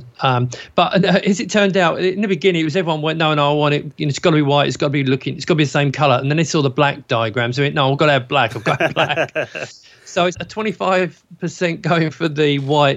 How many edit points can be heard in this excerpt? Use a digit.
1